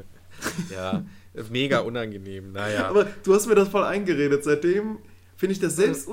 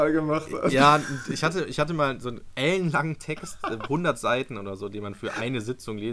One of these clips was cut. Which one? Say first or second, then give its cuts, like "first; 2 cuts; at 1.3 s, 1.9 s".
second; 1 cut; at 3.9 s